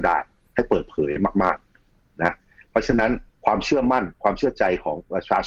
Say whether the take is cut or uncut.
uncut